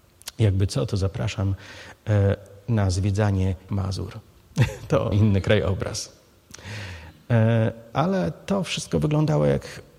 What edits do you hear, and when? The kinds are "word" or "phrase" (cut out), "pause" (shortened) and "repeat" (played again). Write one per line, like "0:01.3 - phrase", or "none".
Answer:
0:03.7 - word
0:05.1 - word